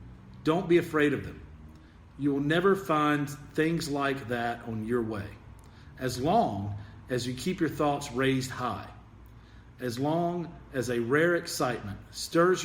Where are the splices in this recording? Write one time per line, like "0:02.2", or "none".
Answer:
none